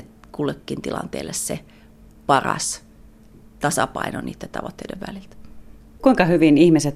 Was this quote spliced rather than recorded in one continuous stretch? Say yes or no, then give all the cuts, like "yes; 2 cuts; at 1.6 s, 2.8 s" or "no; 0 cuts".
no; 0 cuts